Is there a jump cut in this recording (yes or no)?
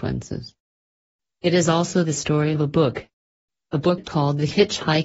no